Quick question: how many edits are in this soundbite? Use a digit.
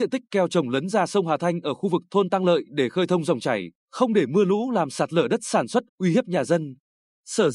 2